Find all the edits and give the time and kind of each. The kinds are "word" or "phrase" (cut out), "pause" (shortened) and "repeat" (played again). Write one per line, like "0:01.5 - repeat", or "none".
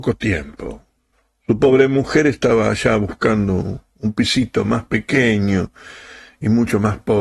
0:01.0 - pause